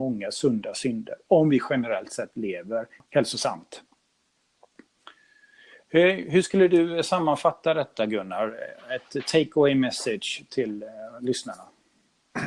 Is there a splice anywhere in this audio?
no; 0 cuts

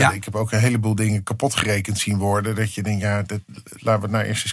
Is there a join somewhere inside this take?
no; 0 cuts

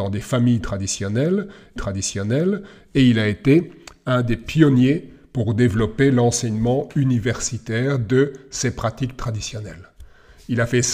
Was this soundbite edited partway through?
yes; 1 cut; at 1.8 s

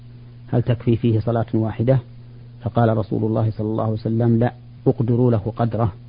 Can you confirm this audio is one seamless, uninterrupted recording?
yes; 0 cuts

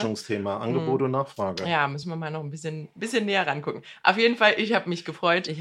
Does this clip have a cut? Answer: no; 0 cuts

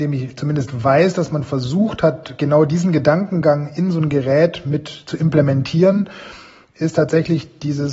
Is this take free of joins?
yes; 0 cuts

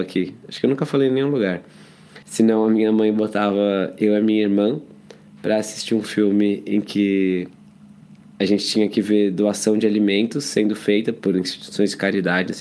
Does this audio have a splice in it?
yes; 1 cut; at 2.2 s

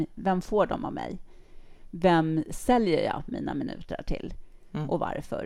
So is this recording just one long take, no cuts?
yes; 0 cuts

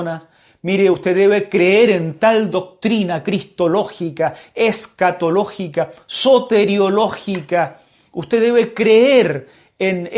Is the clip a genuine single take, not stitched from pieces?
yes; 0 cuts

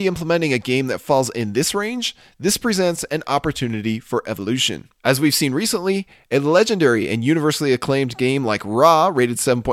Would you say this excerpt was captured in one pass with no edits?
no; 1 cut; at 5.0 s

